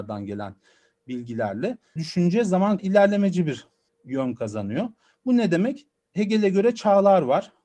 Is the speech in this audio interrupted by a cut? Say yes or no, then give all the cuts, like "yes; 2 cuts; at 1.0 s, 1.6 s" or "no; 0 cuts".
yes; 3 cuts; at 2.0 s, 2.8 s, 3.9 s